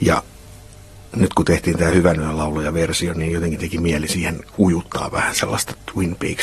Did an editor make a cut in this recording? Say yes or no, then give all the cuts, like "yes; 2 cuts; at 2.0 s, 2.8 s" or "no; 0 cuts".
no; 0 cuts